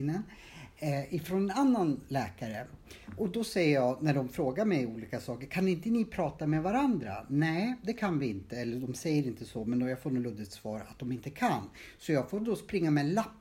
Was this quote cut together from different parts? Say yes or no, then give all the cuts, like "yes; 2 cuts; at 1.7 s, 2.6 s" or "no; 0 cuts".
no; 0 cuts